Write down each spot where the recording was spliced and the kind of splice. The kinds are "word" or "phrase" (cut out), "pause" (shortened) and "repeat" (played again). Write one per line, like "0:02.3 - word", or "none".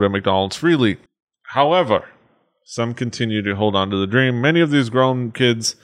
0:01.1 - pause